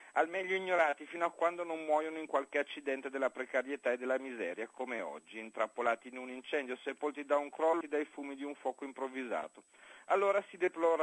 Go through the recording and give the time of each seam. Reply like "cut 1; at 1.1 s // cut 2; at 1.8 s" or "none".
cut 1; at 7.8 s